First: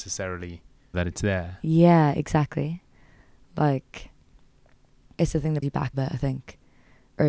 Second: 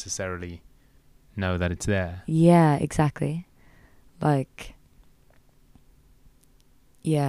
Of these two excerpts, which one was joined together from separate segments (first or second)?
first